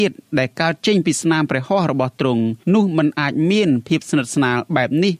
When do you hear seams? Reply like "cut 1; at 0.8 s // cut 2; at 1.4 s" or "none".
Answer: cut 1; at 2.6 s